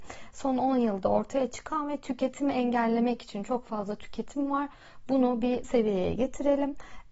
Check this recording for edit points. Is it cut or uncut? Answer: cut